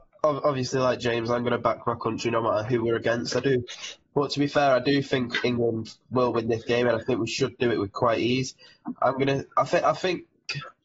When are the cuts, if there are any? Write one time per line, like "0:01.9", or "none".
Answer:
none